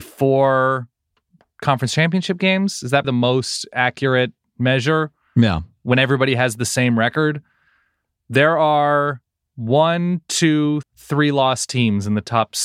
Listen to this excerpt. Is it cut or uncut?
cut